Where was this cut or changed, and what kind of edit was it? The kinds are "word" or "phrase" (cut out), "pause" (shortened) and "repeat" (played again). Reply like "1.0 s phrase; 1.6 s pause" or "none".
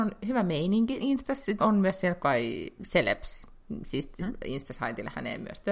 1.0 s word; 1.6 s word; 2.2 s word; 2.8 s word; 4.2 s word